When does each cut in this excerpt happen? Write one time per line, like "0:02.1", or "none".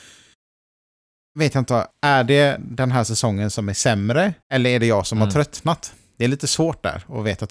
0:01.9
0:04.4